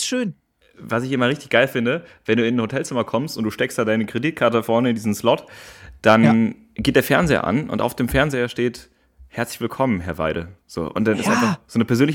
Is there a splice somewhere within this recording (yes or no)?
yes